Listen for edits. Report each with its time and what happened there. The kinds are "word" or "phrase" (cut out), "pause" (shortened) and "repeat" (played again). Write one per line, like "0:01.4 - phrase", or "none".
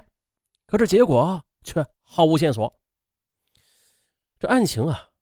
0:01.9 - pause